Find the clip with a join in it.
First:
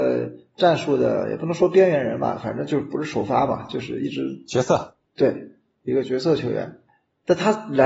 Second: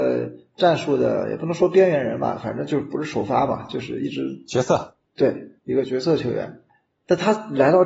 second; 1 cut; at 5.6 s

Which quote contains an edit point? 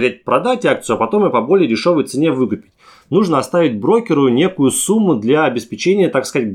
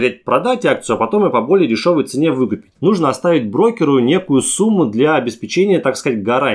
second; 1 cut; at 2.7 s

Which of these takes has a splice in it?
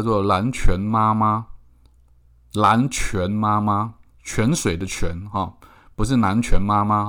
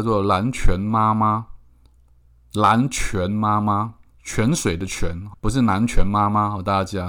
second; 1 cut; at 5.3 s

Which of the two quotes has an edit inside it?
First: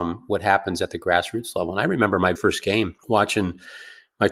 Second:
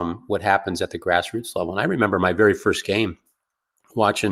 first; 2 cuts; at 2.4 s, 3.0 s

